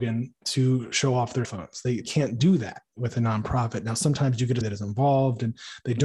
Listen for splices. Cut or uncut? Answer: cut